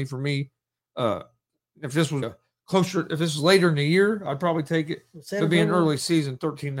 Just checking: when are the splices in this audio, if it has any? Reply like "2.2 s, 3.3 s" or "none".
2.2 s